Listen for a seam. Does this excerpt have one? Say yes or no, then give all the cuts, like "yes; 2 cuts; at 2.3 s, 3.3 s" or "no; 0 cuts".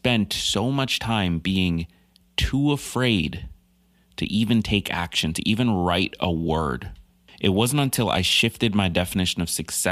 no; 0 cuts